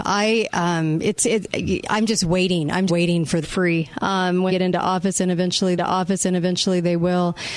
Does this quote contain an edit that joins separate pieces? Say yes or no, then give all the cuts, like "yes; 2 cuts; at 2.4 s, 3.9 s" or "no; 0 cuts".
yes; 4 cuts; at 2.9 s, 3.4 s, 4.5 s, 5.8 s